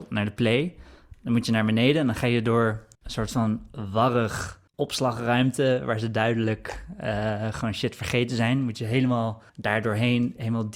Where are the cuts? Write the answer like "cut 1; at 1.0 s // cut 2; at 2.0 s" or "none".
cut 1; at 2.9 s // cut 2; at 4.7 s // cut 3; at 9.5 s

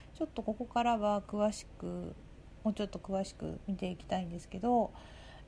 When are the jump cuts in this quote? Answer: none

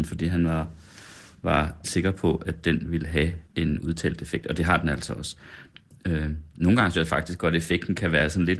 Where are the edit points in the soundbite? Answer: cut 1; at 1.8 s // cut 2; at 3.5 s // cut 3; at 6.5 s // cut 4; at 6.9 s

